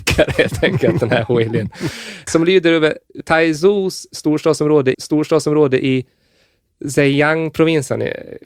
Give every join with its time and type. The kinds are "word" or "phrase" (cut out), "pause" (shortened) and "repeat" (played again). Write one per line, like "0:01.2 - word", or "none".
0:02.3 - word
0:03.2 - word
0:04.9 - repeat